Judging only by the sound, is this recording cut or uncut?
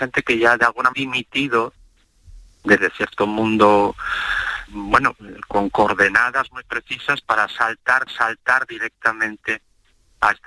cut